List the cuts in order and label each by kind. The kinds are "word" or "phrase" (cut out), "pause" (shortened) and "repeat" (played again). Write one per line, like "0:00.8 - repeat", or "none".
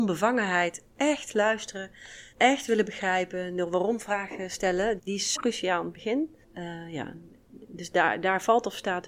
0:02.3 - pause
0:05.0 - word
0:05.4 - word
0:06.4 - pause